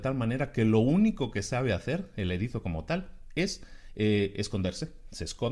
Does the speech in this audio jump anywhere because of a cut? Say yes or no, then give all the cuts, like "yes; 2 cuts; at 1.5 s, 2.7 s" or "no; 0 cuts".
no; 0 cuts